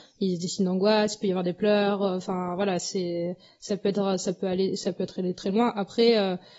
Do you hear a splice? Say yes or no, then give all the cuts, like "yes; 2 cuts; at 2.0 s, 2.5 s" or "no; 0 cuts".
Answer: no; 0 cuts